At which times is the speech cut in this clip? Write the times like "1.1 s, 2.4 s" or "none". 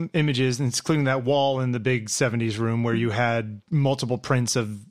none